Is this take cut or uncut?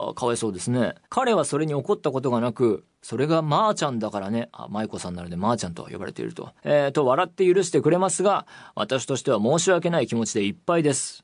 cut